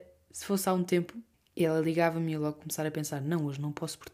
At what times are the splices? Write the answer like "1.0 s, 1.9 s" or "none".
1.3 s